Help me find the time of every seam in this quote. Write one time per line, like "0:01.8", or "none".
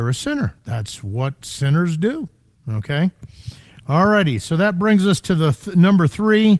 0:02.5